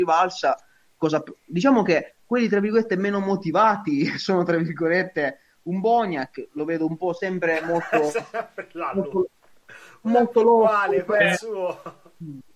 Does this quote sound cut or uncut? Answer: uncut